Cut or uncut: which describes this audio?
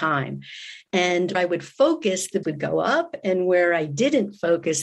cut